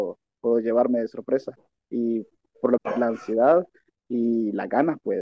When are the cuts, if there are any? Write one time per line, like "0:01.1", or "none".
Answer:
0:02.8